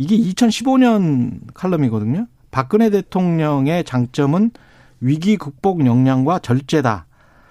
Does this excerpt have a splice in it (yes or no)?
no